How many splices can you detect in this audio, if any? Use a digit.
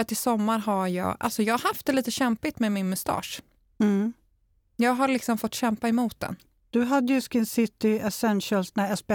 0